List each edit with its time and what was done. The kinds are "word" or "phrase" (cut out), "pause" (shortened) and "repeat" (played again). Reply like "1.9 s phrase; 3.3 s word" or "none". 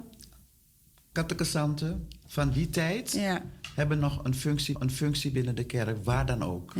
4.7 s repeat